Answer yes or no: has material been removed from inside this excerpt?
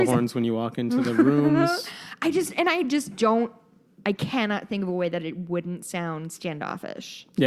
no